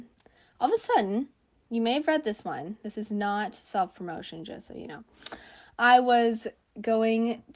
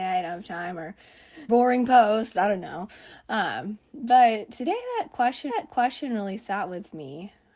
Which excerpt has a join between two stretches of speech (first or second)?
second